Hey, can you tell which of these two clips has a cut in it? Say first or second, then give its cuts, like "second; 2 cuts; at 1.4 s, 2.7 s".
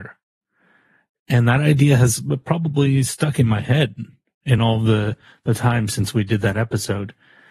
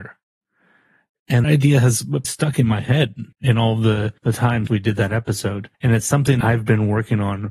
second; 7 cuts; at 1.4 s, 2.2 s, 3.3 s, 4.2 s, 4.7 s, 5.7 s, 6.4 s